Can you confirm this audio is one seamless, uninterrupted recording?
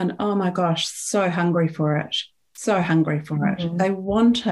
yes; 0 cuts

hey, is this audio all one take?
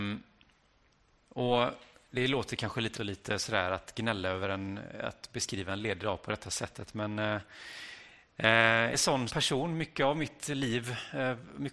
no; 3 cuts; at 2.9 s, 8.9 s, 9.3 s

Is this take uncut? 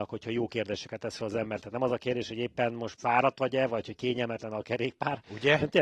yes; 0 cuts

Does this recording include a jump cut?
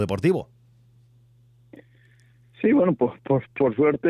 no; 0 cuts

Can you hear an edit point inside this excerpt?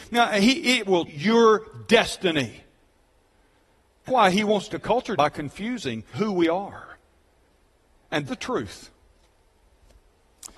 yes; 6 cuts; at 1.1 s, 4.1 s, 4.7 s, 5.2 s, 6.1 s, 8.3 s

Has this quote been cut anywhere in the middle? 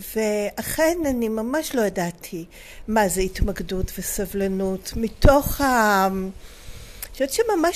no; 0 cuts

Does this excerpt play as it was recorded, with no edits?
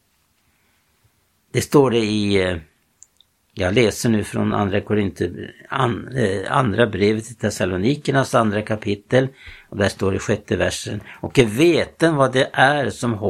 yes; 0 cuts

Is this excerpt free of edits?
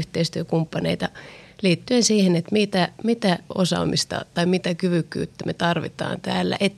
yes; 0 cuts

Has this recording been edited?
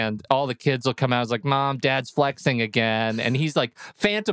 no; 0 cuts

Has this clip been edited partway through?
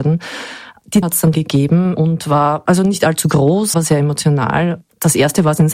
yes; 4 cuts; at 1.0 s, 1.3 s, 2.7 s, 3.7 s

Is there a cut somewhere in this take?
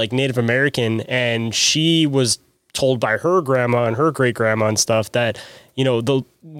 no; 0 cuts

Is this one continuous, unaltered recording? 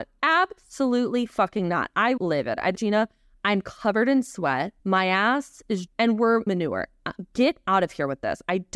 no; 5 cuts; at 2.2 s, 2.7 s, 4.8 s, 5.9 s, 6.5 s

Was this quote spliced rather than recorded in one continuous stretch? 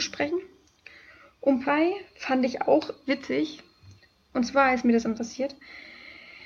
yes; 3 cuts; at 1.6 s, 3.1 s, 5.1 s

